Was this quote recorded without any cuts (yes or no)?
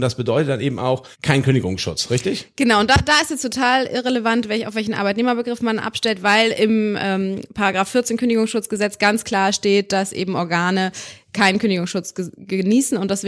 no